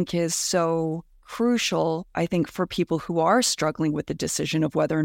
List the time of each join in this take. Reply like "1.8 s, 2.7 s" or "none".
none